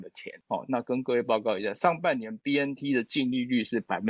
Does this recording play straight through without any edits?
yes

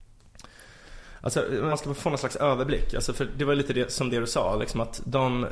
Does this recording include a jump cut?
yes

